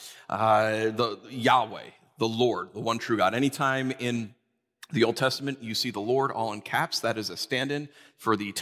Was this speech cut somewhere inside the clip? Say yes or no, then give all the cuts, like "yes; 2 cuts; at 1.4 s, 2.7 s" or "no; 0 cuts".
no; 0 cuts